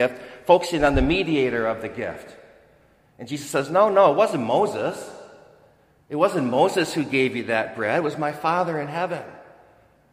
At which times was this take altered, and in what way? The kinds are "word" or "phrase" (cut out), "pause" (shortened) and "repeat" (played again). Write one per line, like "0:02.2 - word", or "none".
none